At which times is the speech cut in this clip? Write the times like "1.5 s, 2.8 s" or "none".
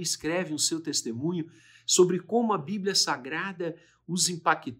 none